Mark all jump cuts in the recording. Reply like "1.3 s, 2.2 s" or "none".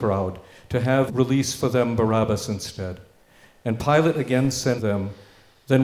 1.1 s, 4.8 s